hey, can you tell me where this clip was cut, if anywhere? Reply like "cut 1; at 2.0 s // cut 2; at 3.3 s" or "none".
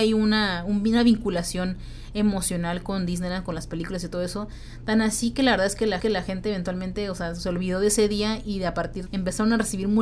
cut 1; at 6.0 s // cut 2; at 9.1 s